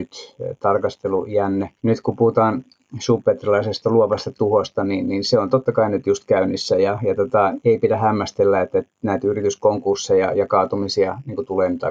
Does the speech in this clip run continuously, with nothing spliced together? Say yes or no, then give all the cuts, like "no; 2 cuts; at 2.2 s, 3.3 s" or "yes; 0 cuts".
no; 1 cut; at 1.8 s